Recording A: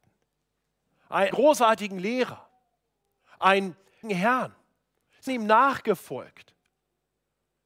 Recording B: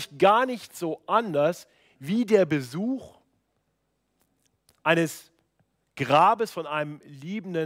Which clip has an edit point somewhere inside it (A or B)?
A